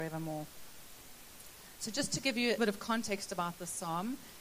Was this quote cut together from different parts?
yes; 1 cut; at 2.6 s

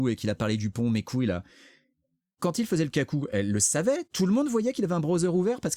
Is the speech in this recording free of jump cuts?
yes; 0 cuts

